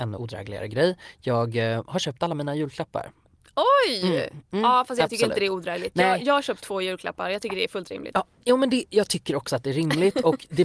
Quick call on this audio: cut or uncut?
uncut